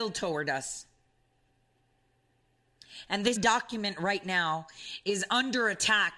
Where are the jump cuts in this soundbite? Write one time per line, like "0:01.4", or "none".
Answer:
0:03.4